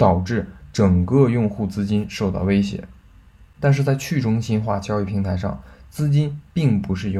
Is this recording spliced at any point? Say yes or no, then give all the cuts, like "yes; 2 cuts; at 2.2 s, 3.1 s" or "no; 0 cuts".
no; 0 cuts